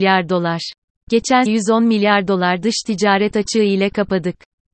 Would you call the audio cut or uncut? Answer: cut